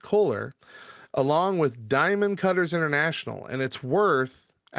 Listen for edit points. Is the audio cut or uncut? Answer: uncut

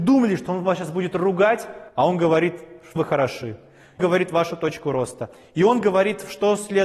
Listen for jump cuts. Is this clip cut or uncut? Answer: cut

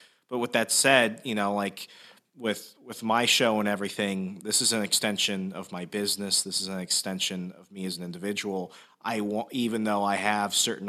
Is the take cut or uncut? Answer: uncut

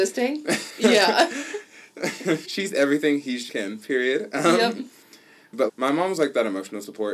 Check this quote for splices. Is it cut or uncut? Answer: cut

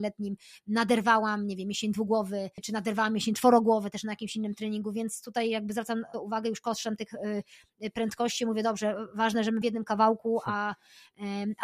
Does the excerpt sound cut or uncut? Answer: cut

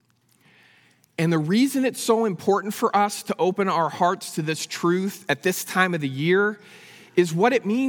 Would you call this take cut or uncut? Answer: uncut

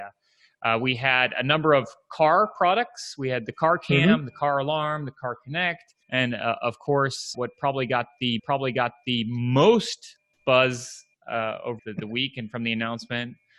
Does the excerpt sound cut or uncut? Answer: cut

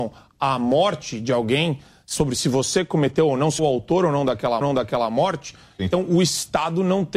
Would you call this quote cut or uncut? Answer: cut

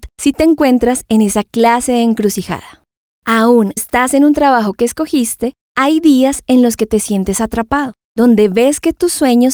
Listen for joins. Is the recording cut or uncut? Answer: cut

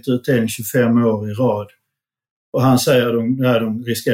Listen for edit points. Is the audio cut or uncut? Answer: uncut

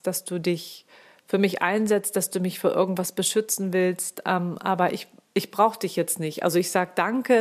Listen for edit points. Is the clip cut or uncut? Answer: cut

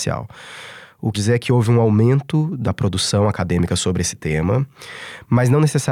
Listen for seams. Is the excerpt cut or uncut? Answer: cut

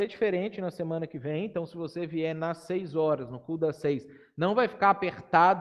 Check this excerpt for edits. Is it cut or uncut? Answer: uncut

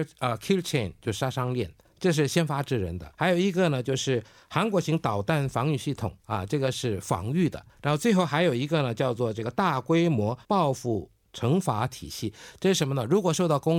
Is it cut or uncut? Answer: cut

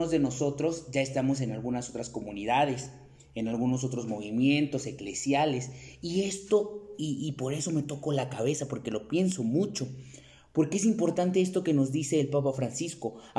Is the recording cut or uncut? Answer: uncut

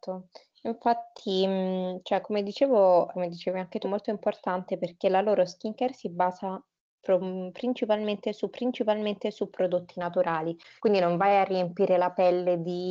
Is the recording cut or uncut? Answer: cut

